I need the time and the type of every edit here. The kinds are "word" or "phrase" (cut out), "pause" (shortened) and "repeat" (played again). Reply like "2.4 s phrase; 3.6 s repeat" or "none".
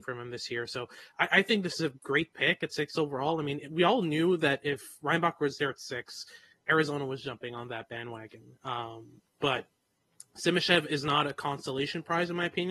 none

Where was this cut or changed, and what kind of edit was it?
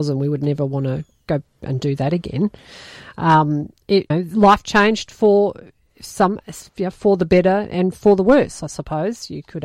4.1 s word; 4.6 s phrase; 6.7 s pause

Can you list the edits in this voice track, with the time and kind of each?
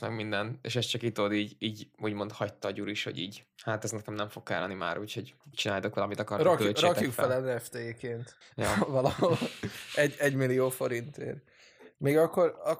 3.5 s pause; 5.4 s pause; 8.4 s pause

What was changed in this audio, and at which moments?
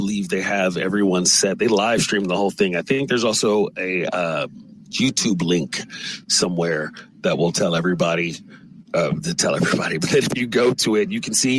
none

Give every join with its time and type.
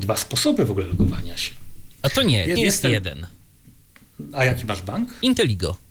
2.6 s phrase

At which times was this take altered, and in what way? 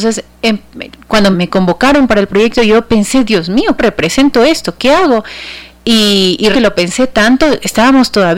1.3 s word; 3.8 s word; 6.5 s word

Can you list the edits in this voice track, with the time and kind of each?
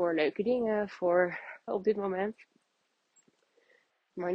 1.7 s word

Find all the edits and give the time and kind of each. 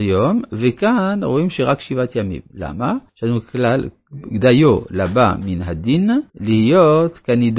3.1 s pause; 6.3 s pause

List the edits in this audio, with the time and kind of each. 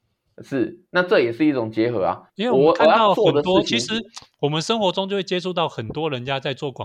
2.3 s pause

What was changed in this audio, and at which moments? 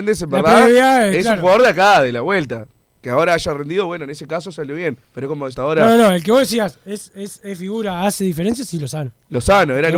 5.0 s pause; 5.5 s phrase

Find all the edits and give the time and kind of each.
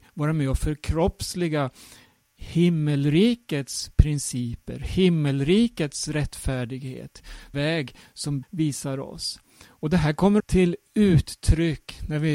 7.5 s word; 8.4 s word; 10.4 s word

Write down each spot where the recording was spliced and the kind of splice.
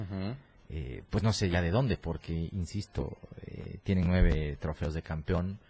none

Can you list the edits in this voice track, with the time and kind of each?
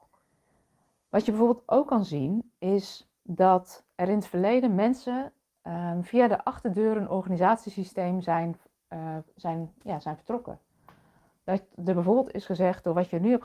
none

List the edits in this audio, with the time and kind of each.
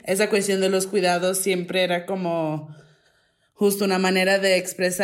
none

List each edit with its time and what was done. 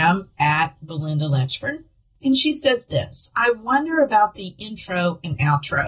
none

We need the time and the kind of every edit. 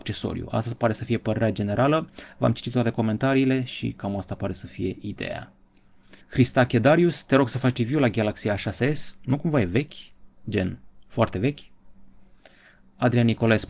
6.2 s pause

